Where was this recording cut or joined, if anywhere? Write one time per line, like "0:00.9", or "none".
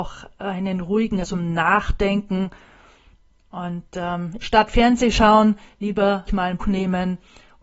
0:01.2
0:04.4
0:06.3
0:06.6